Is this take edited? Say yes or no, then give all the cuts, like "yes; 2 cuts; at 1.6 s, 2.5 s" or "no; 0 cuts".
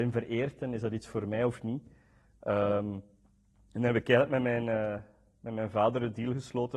no; 0 cuts